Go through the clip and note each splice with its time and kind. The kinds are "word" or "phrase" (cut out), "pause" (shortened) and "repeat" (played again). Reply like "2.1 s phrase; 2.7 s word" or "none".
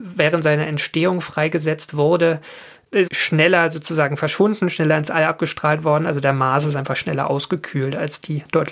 3.1 s word